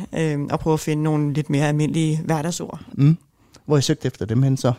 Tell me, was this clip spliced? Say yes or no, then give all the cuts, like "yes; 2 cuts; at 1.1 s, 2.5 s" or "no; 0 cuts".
no; 0 cuts